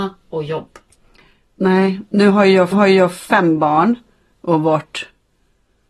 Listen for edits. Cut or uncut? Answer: cut